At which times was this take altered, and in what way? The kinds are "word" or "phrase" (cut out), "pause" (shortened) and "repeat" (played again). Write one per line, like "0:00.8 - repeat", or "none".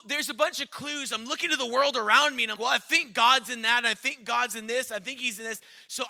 0:02.6 - word